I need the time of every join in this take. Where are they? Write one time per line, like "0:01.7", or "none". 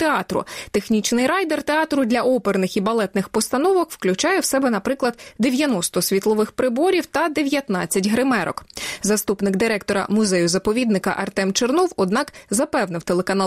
none